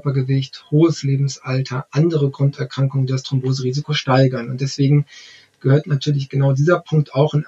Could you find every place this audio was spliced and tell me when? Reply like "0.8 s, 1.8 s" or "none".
none